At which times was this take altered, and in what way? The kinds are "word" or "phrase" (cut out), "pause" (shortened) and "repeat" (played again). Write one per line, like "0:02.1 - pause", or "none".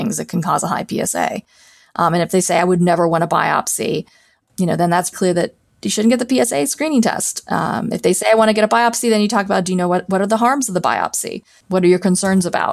0:05.1 - word